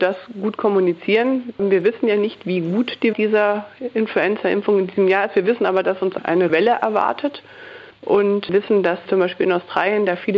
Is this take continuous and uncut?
no; 3 cuts; at 3.1 s, 6.5 s, 9.1 s

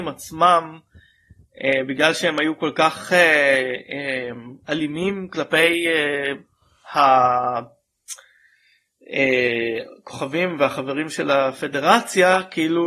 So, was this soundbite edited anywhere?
no; 0 cuts

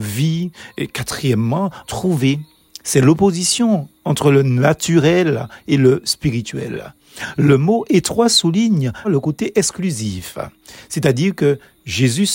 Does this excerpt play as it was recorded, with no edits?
no; 2 cuts; at 1.8 s, 9.0 s

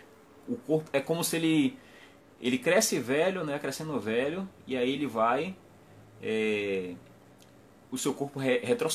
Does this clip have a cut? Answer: no; 0 cuts

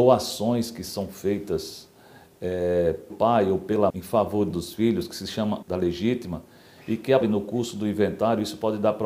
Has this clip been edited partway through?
yes; 5 cuts; at 3.1 s, 3.9 s, 4.5 s, 5.6 s, 7.2 s

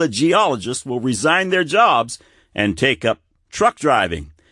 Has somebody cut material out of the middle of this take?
no; 0 cuts

